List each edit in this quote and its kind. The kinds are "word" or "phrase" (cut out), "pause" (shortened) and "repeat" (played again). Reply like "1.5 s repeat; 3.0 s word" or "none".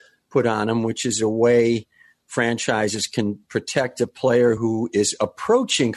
none

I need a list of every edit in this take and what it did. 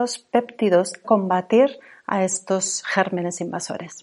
1.0 s phrase

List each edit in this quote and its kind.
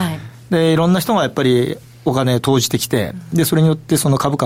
none

